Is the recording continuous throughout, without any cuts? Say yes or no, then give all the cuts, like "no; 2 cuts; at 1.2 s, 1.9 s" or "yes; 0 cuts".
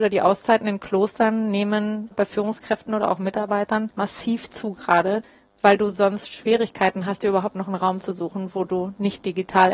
no; 1 cut; at 2.1 s